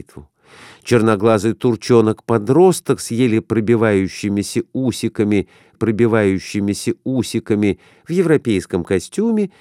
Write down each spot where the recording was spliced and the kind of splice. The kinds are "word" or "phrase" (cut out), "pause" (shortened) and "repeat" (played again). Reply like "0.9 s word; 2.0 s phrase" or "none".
5.7 s repeat